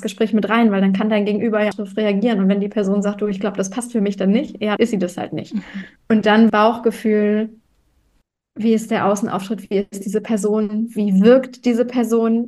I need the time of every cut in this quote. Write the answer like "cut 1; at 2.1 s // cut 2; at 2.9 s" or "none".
cut 1; at 1.7 s // cut 2; at 4.8 s // cut 3; at 6.0 s // cut 4; at 6.5 s

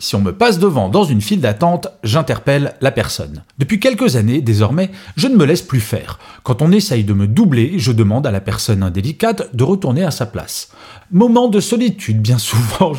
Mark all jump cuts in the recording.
cut 1; at 3.5 s

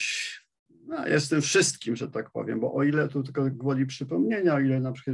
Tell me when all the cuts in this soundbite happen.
none

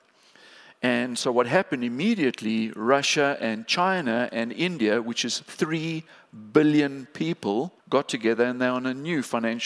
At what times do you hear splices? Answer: cut 1; at 7.8 s

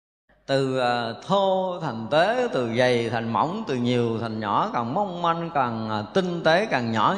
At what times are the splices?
none

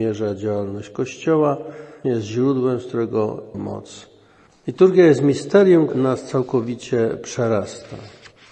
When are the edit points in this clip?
cut 1; at 2.0 s // cut 2; at 3.5 s // cut 3; at 5.9 s

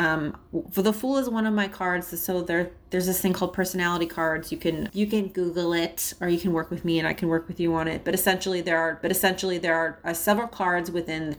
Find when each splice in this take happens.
cut 1; at 4.9 s // cut 2; at 9.0 s

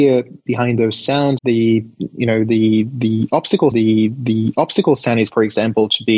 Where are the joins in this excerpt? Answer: cut 1; at 1.4 s // cut 2; at 3.7 s // cut 3; at 5.3 s

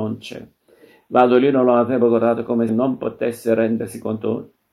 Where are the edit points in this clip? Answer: cut 1; at 2.7 s

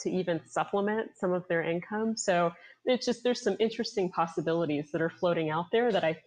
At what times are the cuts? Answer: none

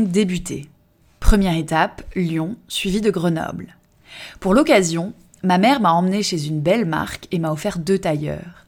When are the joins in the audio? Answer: none

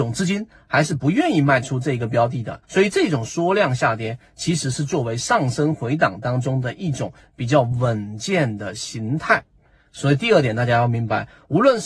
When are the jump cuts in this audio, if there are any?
cut 1; at 2.6 s

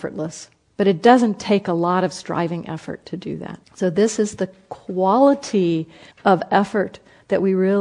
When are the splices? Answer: cut 1; at 3.6 s // cut 2; at 6.1 s

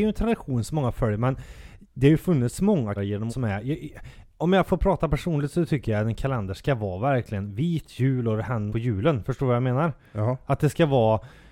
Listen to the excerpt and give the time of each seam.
cut 1; at 3.0 s // cut 2; at 3.3 s // cut 3; at 8.7 s

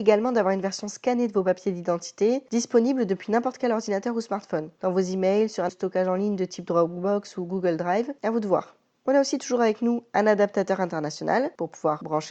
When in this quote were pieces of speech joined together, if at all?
cut 1; at 5.7 s

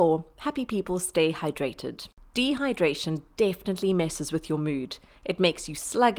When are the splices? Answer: none

